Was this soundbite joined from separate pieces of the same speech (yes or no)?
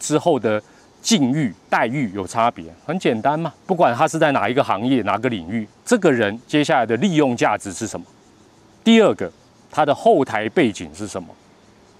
yes